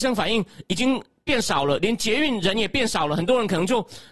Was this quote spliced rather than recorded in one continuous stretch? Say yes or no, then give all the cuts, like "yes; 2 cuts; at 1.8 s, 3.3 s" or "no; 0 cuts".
no; 0 cuts